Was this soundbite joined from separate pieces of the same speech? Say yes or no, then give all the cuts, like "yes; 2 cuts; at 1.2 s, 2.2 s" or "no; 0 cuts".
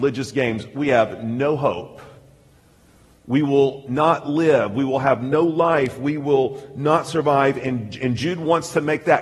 no; 0 cuts